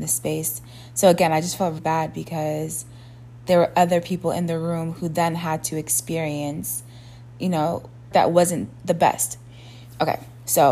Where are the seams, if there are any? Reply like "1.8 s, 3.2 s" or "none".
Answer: 1.8 s, 7.3 s, 8.1 s

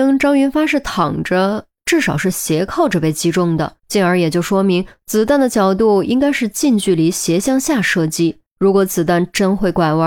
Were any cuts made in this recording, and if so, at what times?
3.8 s, 8.5 s

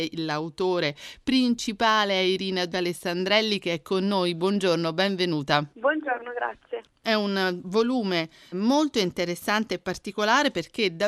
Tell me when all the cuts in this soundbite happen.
2.7 s, 5.7 s, 8.5 s

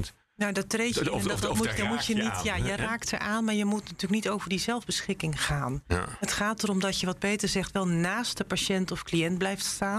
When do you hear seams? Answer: none

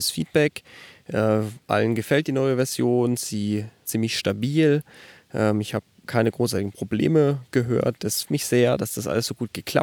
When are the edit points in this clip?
3.8 s, 6.1 s, 8.2 s

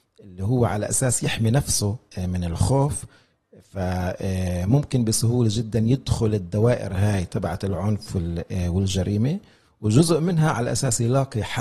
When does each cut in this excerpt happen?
none

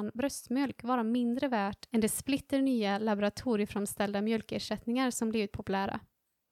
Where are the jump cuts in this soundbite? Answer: none

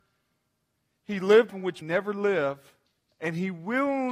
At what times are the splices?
1.5 s, 1.8 s, 2.9 s

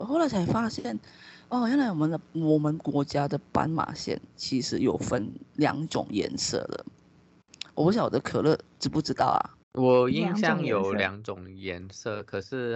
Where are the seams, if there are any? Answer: 2.2 s, 9.6 s

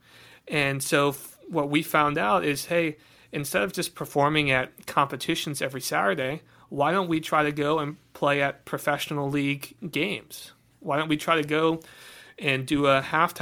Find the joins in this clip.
none

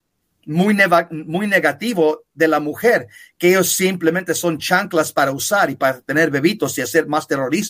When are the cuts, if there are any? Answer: none

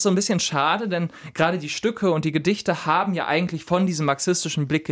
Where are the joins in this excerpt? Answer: none

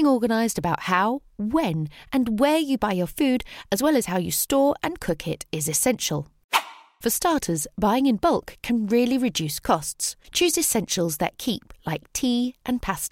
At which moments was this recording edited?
none

